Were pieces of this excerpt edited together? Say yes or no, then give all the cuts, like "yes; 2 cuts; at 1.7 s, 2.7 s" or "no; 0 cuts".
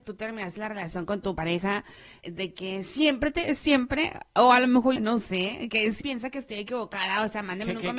yes; 3 cuts; at 2.2 s, 5.0 s, 6.0 s